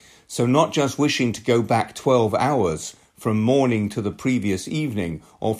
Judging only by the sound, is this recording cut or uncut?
uncut